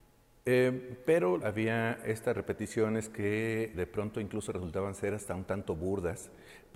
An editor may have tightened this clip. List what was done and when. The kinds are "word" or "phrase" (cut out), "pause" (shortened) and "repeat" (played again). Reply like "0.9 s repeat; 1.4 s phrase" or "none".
1.4 s phrase; 3.7 s word